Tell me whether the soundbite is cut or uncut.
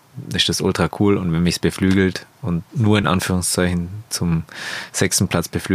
uncut